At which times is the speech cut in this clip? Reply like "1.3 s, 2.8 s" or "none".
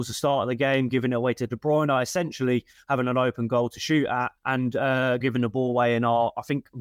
4.4 s, 5.2 s